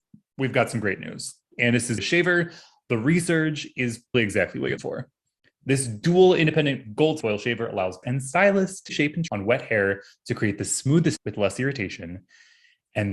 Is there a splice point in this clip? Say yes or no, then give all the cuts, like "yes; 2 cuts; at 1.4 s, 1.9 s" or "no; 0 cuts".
yes; 8 cuts; at 2.0 s, 4.1 s, 4.8 s, 7.2 s, 8.0 s, 8.9 s, 9.3 s, 11.2 s